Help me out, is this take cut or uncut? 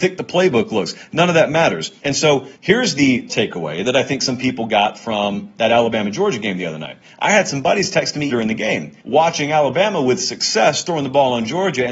cut